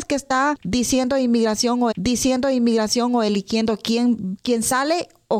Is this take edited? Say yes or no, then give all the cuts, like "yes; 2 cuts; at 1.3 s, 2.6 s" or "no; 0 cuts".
yes; 1 cut; at 1.9 s